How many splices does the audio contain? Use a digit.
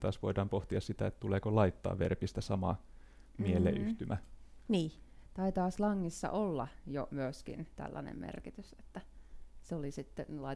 0